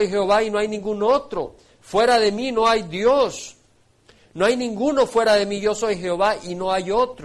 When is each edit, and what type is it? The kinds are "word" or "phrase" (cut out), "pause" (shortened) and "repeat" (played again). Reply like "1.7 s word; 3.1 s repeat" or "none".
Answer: none